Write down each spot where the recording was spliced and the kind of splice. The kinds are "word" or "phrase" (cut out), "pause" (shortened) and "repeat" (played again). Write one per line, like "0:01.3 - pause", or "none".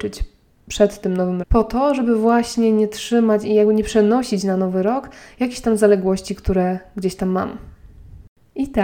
0:01.4 - word